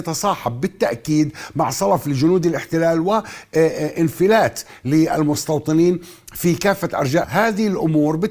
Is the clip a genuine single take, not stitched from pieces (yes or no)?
no